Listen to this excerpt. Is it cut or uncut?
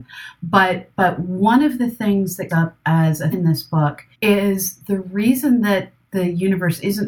cut